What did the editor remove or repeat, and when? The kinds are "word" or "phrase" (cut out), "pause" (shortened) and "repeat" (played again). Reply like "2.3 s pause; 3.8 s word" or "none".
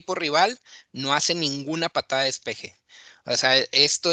none